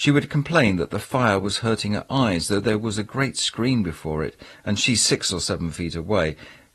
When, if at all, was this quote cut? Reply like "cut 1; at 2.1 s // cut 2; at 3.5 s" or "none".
none